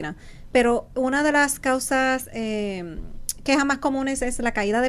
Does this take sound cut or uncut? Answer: uncut